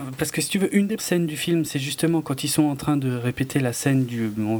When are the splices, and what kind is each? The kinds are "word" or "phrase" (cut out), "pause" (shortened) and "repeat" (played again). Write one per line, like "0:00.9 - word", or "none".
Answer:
0:01.0 - word